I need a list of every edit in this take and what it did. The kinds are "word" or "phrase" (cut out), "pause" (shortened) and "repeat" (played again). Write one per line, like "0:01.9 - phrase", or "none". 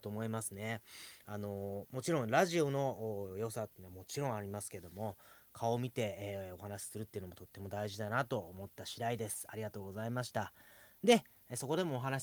none